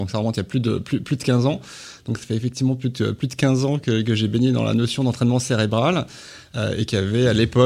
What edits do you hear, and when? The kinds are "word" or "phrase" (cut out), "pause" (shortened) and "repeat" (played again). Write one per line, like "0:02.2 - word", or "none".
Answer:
none